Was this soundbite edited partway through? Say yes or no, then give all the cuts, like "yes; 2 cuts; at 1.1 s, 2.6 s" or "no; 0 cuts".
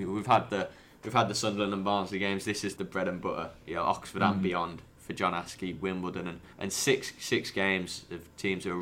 yes; 2 cuts; at 2.8 s, 6.5 s